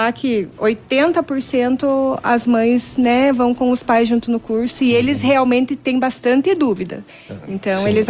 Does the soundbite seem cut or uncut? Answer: uncut